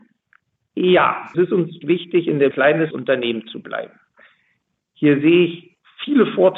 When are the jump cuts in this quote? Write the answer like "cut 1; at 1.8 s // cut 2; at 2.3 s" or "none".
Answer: cut 1; at 1.3 s // cut 2; at 1.8 s // cut 3; at 2.5 s // cut 4; at 2.9 s